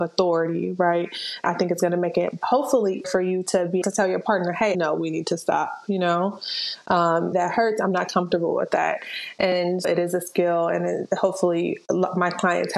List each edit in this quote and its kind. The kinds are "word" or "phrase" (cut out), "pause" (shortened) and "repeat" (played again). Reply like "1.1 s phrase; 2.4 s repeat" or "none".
1.4 s word; 3.0 s word; 3.8 s word; 4.7 s word; 7.3 s word; 9.8 s word